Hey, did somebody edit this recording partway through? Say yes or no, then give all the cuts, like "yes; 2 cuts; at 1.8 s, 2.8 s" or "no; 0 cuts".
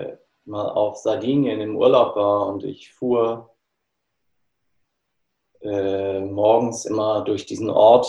no; 0 cuts